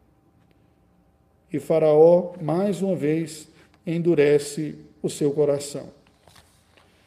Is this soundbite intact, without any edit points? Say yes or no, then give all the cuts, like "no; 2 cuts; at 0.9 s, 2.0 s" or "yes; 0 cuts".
yes; 0 cuts